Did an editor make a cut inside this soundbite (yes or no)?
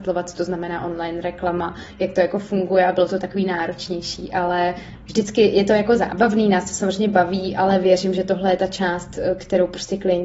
no